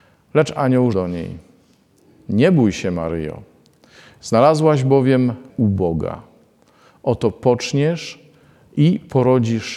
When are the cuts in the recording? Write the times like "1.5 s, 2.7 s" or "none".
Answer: 0.9 s, 5.5 s